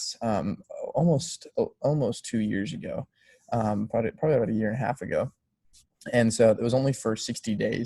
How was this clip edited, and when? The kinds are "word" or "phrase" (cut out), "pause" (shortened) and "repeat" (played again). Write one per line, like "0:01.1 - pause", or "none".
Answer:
none

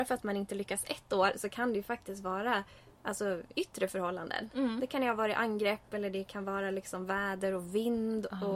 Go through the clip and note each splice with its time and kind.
none

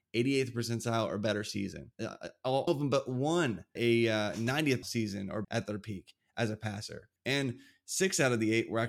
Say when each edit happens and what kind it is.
0:01.9 - pause
0:02.7 - word
0:03.8 - word
0:04.8 - word
0:05.4 - word
0:07.2 - pause

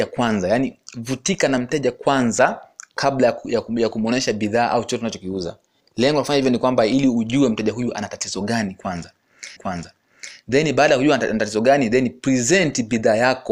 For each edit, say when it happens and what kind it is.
0:05.8 - pause
0:09.6 - repeat

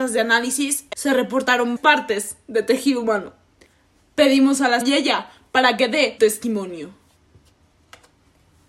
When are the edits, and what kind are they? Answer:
0:00.9 - word
0:01.8 - word
0:04.8 - word
0:06.2 - word

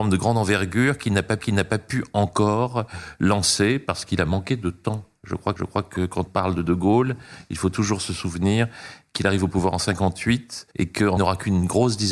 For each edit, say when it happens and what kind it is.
0:01.4 - repeat
0:05.6 - repeat
0:06.3 - word
0:10.7 - pause
0:11.2 - phrase

